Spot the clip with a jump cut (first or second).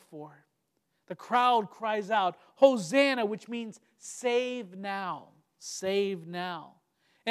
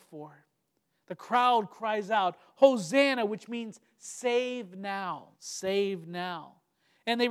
second